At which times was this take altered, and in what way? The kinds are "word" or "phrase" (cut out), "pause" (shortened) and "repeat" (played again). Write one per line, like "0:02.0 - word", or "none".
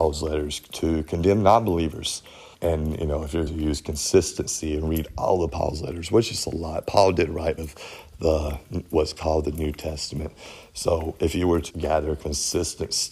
0:02.5 - pause
0:03.5 - word
0:07.6 - word
0:11.7 - word

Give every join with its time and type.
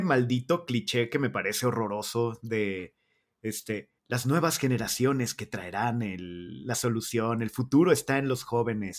0:04.0 - pause

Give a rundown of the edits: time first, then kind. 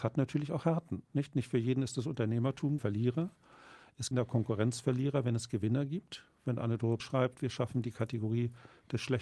0:01.0 - pause
0:02.8 - phrase
0:04.1 - phrase
0:07.0 - word

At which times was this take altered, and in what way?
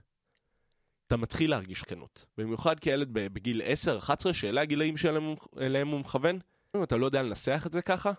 0:01.1 - word
0:01.8 - word
0:02.3 - pause
0:06.7 - word

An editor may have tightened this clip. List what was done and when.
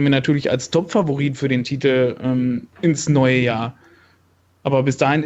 0:02.7 - pause

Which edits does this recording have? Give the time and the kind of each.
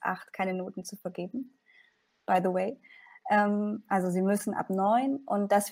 none

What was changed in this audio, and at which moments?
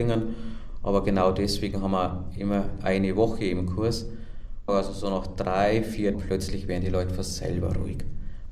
0:04.7 - phrase
0:06.1 - word

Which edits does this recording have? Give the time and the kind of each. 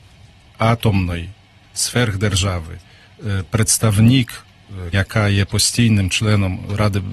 0:01.6 - word
0:04.9 - word

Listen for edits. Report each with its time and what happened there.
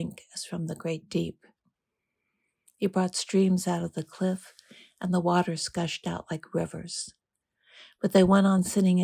none

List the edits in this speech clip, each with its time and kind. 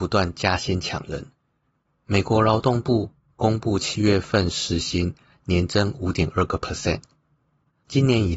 none

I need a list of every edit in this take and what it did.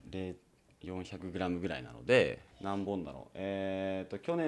0:02.5 - pause

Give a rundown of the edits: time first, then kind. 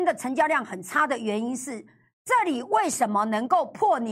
none

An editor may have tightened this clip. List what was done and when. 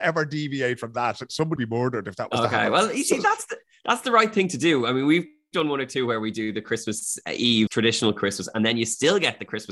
0:01.6 - word
0:07.7 - word

